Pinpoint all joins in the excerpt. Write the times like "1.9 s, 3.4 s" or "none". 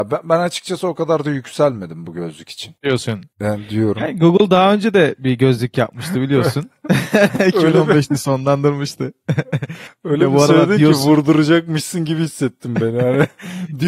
none